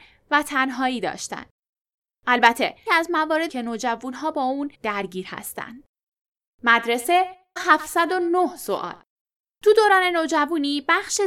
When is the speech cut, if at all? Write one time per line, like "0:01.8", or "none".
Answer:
0:02.9
0:03.5
0:04.7
0:07.6